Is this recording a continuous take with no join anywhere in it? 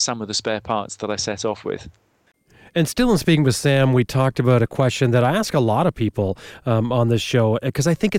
yes; 0 cuts

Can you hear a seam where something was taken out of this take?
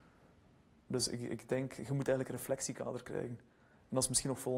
no; 0 cuts

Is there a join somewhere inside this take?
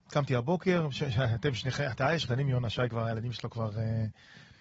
yes; 1 cut; at 2.2 s

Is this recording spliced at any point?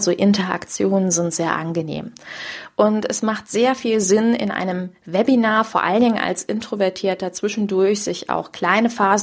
no; 0 cuts

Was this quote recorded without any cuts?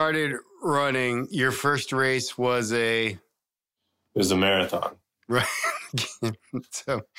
yes; 0 cuts

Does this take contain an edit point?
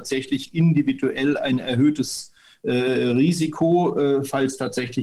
no; 0 cuts

